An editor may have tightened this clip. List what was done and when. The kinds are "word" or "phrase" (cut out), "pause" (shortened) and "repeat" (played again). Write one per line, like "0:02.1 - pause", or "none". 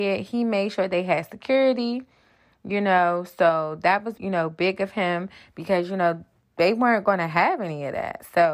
0:04.2 - word